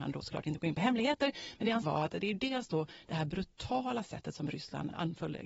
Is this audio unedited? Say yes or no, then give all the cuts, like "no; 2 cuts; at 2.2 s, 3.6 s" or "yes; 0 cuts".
no; 1 cut; at 1.8 s